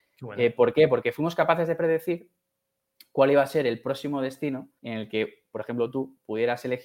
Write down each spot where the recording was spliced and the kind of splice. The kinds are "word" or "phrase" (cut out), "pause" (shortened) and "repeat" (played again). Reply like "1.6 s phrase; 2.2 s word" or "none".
4.8 s pause

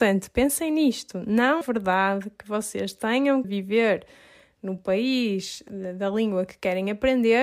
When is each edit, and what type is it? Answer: 1.6 s word; 3.4 s word

